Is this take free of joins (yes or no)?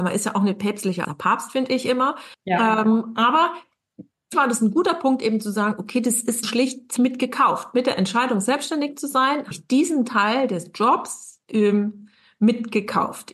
no